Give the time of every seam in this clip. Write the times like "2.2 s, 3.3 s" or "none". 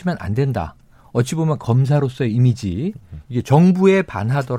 1.6 s